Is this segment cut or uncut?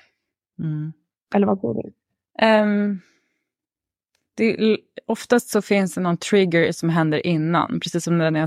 uncut